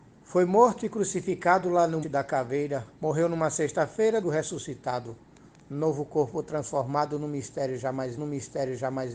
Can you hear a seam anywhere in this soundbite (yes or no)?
yes